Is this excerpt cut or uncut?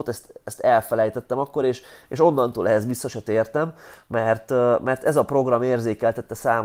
uncut